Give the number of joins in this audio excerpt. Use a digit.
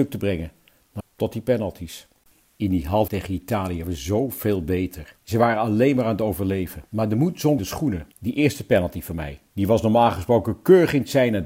9